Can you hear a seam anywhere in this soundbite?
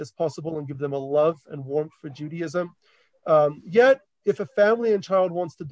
no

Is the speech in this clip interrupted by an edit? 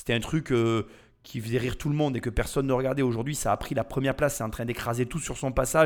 no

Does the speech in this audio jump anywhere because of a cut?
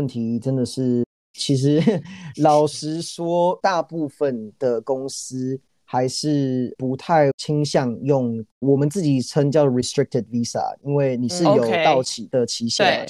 no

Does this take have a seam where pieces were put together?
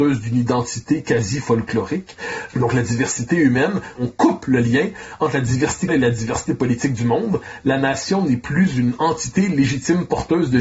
yes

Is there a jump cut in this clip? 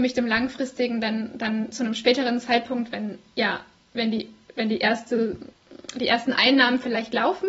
no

